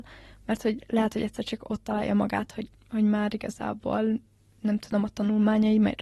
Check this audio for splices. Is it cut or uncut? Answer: uncut